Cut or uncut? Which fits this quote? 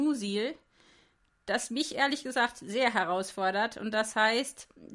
uncut